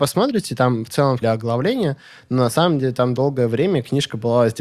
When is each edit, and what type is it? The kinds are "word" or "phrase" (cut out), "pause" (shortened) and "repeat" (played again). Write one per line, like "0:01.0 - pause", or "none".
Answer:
0:01.2 - phrase